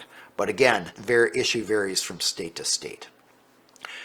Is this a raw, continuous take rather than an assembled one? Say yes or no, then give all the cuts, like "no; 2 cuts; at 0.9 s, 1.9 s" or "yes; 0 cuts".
yes; 0 cuts